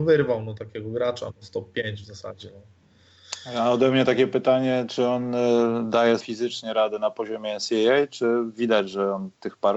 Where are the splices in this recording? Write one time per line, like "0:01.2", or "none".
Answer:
0:06.2